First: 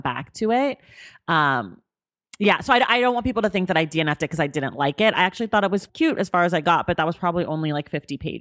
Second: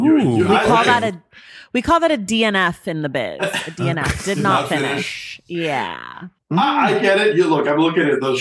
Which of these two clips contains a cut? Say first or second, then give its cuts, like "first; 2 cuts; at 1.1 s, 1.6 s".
first; 1 cut; at 5.9 s